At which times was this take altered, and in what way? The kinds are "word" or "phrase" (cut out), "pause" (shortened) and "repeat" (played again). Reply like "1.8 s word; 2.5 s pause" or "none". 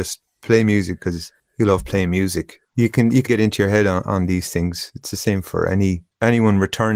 3.3 s word